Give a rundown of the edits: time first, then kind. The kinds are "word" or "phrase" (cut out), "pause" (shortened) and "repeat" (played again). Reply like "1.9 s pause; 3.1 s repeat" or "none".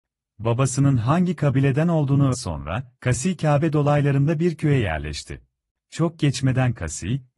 2.3 s word; 5.7 s pause